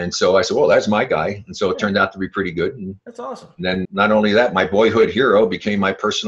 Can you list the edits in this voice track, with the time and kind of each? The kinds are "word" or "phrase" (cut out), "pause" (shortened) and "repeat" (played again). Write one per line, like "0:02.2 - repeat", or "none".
0:03.8 - word

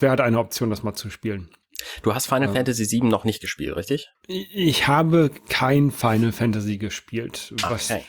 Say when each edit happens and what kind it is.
none

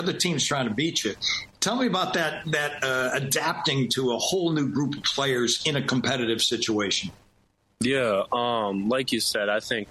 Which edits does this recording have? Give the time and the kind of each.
none

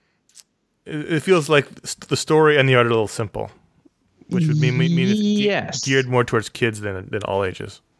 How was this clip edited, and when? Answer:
none

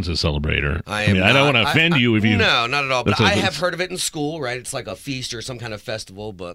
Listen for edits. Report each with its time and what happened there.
none

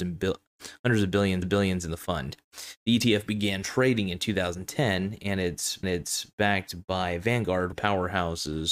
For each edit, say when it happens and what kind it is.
0:01.4 - repeat
0:05.8 - repeat
0:07.7 - phrase

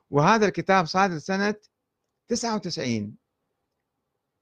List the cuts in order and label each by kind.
none

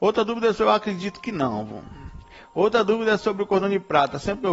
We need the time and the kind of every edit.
none

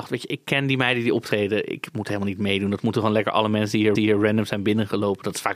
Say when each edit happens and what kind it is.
0:04.0 - repeat

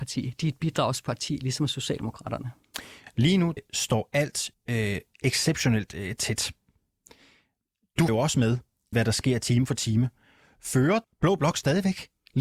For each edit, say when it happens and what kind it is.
0:03.6 - word
0:04.5 - word
0:08.1 - word
0:08.9 - word
0:11.0 - word

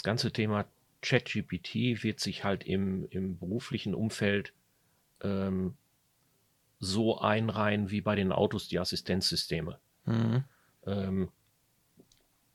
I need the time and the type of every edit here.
none

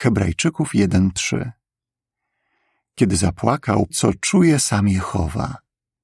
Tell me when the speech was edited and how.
0:03.9 - word

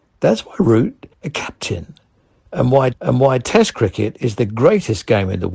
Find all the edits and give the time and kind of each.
0:01.1 - phrase
0:02.9 - repeat

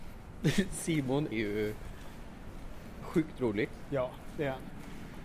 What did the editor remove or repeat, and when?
0:01.3 - word

